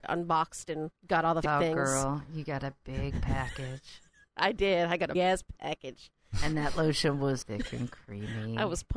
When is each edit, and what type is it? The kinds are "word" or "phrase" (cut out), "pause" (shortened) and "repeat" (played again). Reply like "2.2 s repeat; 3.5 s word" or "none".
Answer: 1.0 s pause; 1.4 s word; 5.1 s word; 7.4 s word